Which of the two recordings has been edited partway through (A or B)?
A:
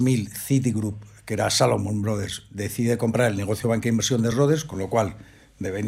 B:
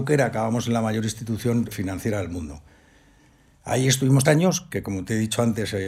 B